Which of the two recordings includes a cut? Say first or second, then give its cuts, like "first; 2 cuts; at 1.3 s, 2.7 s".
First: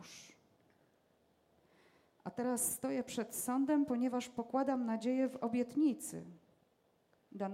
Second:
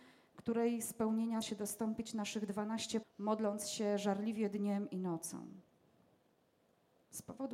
second; 2 cuts; at 1.4 s, 3.0 s